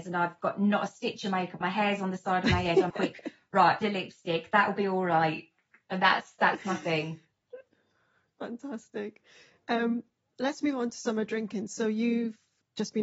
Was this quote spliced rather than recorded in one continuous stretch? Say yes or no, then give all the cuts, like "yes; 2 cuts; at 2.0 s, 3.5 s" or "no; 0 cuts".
yes; 4 cuts; at 1.6 s, 2.9 s, 3.8 s, 6.4 s